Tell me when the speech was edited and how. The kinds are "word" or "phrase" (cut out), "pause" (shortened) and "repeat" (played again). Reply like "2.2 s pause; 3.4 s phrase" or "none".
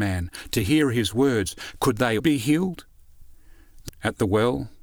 2.2 s word; 3.9 s word